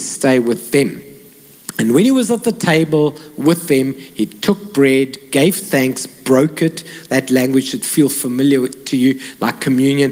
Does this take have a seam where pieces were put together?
no; 0 cuts

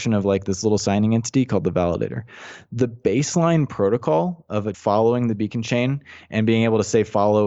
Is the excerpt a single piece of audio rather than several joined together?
no; 1 cut; at 4.7 s

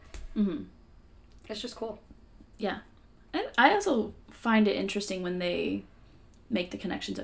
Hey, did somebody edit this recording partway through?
no; 0 cuts

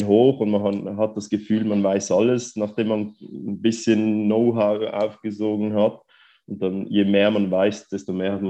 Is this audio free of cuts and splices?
yes; 0 cuts

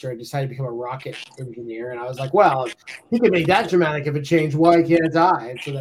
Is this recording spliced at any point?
no; 0 cuts

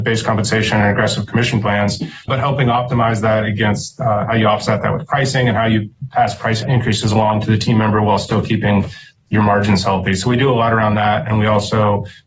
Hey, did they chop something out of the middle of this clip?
no; 0 cuts

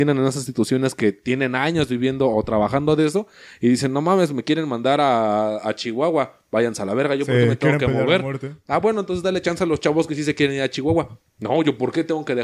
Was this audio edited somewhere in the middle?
no; 0 cuts

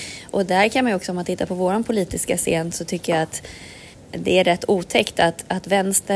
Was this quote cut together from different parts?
yes; 1 cut; at 3.9 s

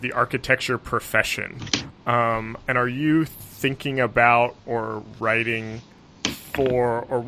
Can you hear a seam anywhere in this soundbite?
no; 0 cuts

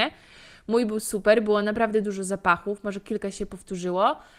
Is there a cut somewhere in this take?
no; 0 cuts

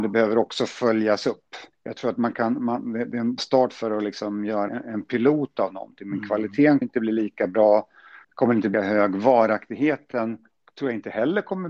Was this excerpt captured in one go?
no; 6 cuts; at 1.7 s, 3.4 s, 4.7 s, 6.8 s, 8.2 s, 8.7 s

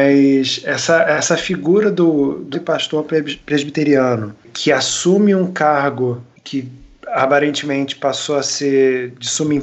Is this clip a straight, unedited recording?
no; 1 cut; at 2.5 s

